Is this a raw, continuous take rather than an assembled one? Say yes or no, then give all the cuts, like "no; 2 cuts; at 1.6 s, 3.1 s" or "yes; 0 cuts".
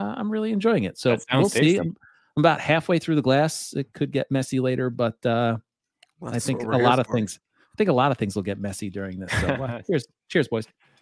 yes; 0 cuts